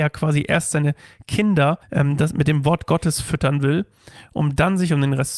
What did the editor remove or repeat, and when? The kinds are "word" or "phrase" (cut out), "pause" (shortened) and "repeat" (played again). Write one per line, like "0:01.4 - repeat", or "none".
0:01.8 - pause